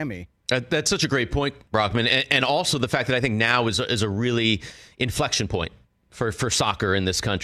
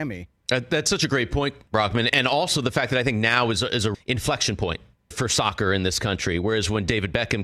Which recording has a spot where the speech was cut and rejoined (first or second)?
second